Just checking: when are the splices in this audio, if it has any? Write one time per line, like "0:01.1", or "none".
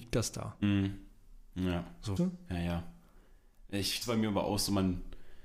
0:02.2
0:04.0